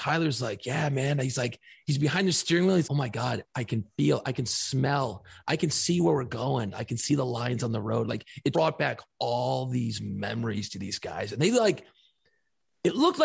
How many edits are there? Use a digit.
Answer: 2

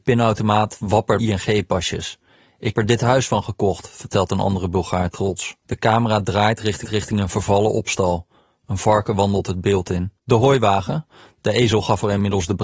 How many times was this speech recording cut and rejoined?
5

